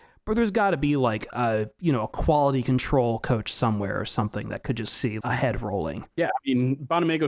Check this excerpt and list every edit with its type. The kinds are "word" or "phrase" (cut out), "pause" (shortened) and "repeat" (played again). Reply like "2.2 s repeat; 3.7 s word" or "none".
5.2 s word; 6.1 s pause